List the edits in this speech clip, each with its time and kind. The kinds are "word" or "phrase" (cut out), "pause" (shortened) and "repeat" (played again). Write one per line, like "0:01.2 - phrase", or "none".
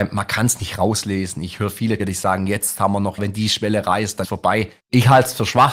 0:02.0 - word
0:03.2 - word
0:04.2 - word
0:04.8 - pause